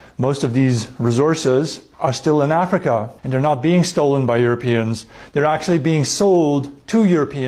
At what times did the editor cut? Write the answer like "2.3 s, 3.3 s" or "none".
1.9 s, 3.2 s